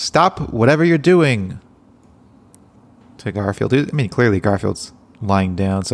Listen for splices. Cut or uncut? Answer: uncut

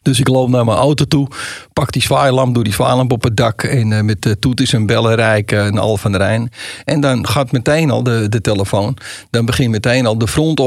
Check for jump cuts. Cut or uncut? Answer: uncut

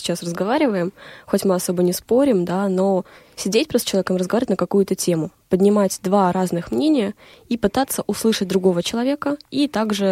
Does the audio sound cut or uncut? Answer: uncut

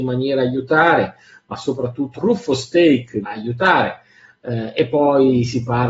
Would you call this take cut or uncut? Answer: cut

